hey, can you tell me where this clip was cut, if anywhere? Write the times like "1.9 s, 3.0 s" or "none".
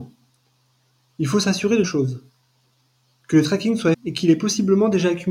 1.8 s, 3.9 s